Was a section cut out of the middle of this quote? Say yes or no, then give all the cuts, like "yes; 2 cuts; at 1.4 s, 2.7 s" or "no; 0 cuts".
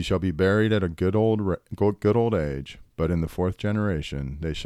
yes; 1 cut; at 2.9 s